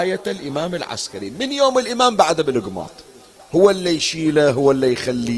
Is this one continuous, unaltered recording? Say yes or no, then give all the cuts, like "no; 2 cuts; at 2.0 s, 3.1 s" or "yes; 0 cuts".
yes; 0 cuts